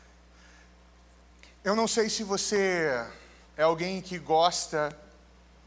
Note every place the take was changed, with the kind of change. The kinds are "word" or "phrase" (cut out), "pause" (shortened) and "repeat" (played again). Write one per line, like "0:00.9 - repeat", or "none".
0:03.4 - pause

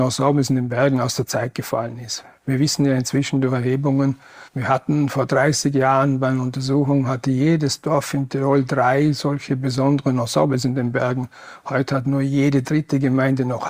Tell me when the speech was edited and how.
0:04.5 - pause

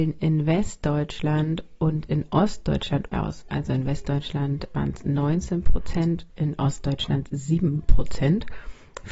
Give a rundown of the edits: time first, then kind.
0:03.1 - word
0:06.3 - word

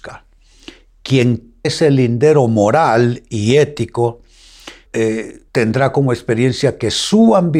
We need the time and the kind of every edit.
0:01.6 - word
0:04.9 - word
0:05.5 - pause

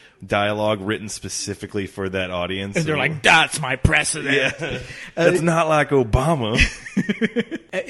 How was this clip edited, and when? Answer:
none

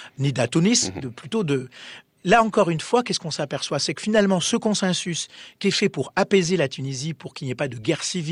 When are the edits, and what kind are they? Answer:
0:05.6 - word

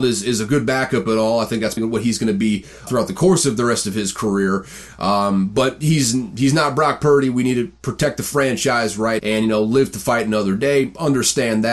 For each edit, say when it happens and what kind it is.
0:01.8 - word
0:02.9 - word
0:09.2 - word

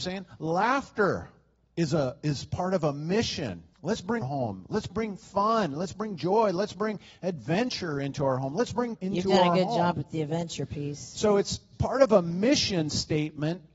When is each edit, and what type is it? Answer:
0:03.7 - pause
0:04.2 - phrase
0:09.0 - word
0:11.7 - word

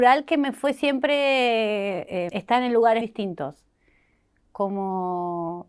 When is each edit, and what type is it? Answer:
0:02.3 - word
0:03.0 - word

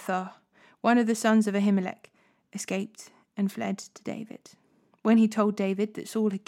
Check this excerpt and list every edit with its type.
none

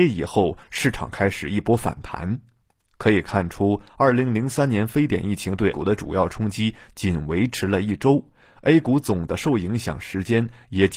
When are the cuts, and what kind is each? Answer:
0:05.7 - word

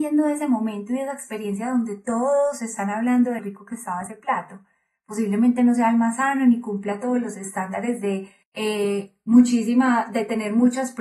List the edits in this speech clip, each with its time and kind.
0:03.4 - word
0:08.4 - pause

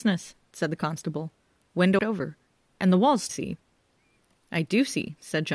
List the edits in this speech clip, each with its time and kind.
0:02.0 - phrase
0:03.3 - phrase

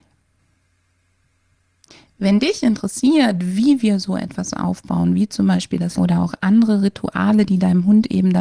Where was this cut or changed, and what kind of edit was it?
0:06.0 - phrase

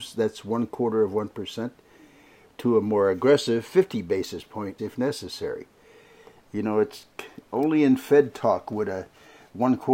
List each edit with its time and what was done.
0:04.8 - word

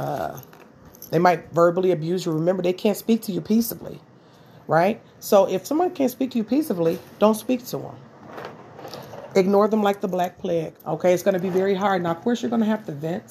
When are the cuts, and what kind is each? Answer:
0:10.8 - pause

